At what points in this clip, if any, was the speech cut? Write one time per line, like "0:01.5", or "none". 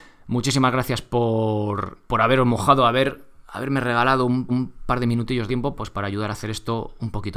0:02.0
0:04.5
0:05.5